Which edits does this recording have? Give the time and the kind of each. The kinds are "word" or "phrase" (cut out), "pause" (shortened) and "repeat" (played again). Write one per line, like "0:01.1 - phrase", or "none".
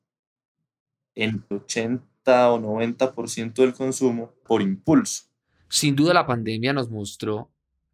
0:01.5 - phrase
0:04.5 - word